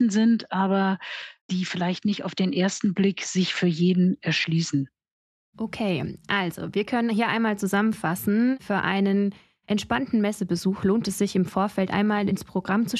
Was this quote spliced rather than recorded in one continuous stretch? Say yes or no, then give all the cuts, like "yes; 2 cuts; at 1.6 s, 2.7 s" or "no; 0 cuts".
no; 0 cuts